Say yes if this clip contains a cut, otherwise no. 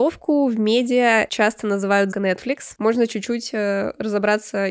yes